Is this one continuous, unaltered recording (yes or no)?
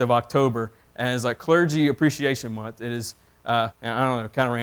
no